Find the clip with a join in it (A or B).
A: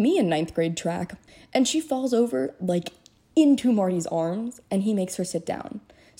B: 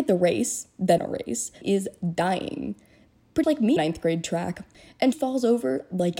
B